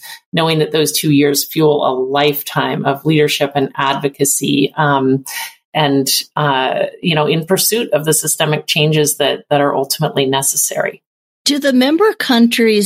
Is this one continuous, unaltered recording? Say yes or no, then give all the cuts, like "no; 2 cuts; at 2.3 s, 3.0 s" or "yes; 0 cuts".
yes; 0 cuts